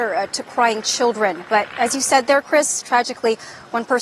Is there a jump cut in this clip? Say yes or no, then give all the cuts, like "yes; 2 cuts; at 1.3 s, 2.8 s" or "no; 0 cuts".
no; 0 cuts